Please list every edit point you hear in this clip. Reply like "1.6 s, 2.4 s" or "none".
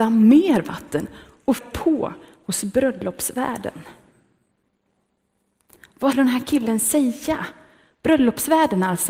1.6 s, 6.1 s

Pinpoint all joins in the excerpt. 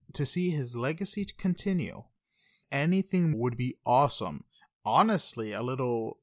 2.6 s, 3.3 s

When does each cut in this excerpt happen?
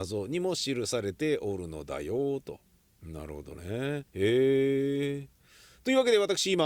4.1 s

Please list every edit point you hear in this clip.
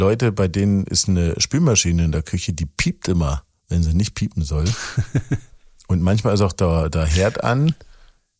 none

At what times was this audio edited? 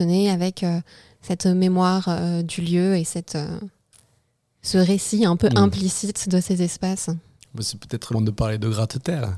8.1 s

